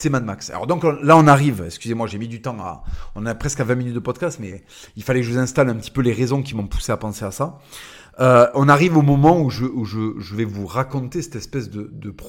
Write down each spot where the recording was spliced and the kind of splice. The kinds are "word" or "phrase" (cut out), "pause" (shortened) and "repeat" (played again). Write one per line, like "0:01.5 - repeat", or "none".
none